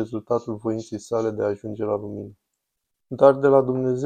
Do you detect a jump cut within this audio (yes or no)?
no